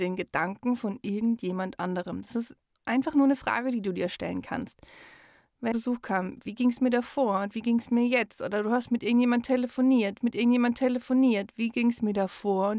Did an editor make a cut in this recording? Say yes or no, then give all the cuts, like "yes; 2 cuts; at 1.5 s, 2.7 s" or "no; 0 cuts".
yes; 2 cuts; at 5.7 s, 10.2 s